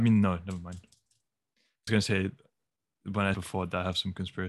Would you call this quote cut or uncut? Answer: cut